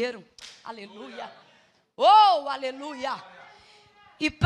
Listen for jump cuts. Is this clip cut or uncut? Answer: cut